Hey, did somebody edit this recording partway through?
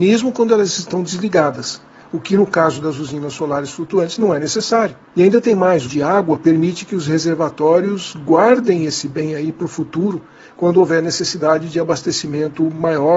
yes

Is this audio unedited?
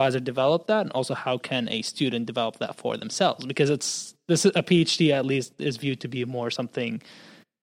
yes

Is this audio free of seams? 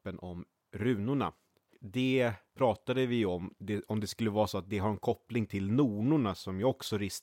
yes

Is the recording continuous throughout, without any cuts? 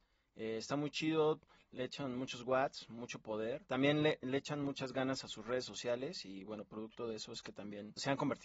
yes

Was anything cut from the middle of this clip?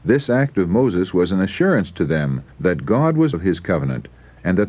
yes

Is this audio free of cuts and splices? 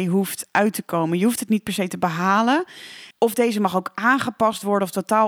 no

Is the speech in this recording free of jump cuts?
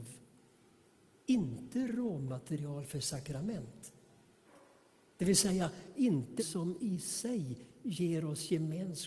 no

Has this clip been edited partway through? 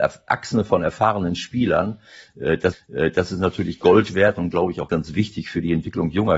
yes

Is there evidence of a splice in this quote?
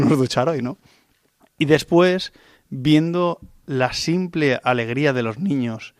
no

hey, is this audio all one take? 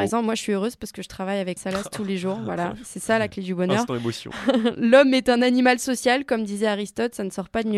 no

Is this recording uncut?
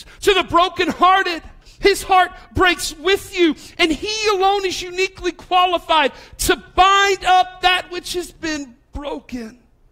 no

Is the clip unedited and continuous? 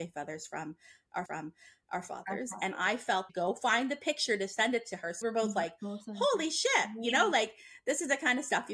no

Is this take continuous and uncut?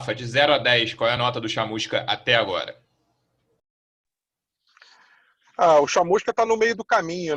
yes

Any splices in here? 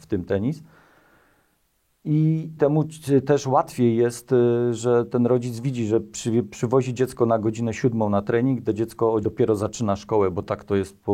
yes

